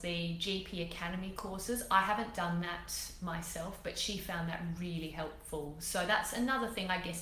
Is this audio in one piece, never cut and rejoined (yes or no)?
yes